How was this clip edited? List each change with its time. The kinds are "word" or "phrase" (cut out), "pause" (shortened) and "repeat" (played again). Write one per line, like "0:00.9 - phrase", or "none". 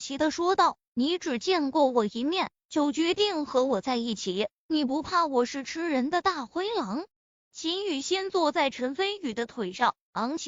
0:07.1 - pause